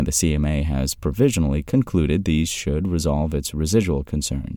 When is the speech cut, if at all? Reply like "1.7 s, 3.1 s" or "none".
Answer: none